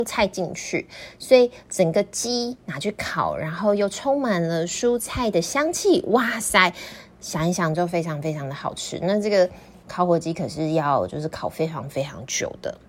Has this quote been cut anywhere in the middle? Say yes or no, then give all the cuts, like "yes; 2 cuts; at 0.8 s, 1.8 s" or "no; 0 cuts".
no; 0 cuts